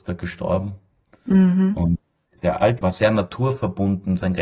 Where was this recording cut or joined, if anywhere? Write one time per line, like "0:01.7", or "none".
0:02.4
0:02.8